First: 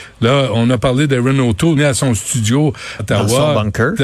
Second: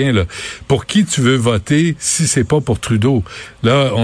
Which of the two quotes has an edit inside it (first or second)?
first